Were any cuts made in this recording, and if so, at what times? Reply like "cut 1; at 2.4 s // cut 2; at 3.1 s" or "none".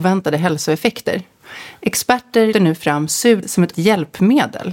cut 1; at 2.5 s // cut 2; at 3.4 s // cut 3; at 3.7 s